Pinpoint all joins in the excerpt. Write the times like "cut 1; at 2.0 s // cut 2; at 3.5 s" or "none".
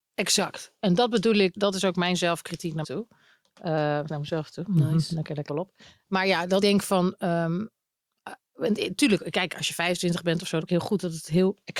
cut 1; at 1.6 s // cut 2; at 2.8 s // cut 3; at 4.1 s // cut 4; at 5.5 s // cut 5; at 6.6 s // cut 6; at 10.6 s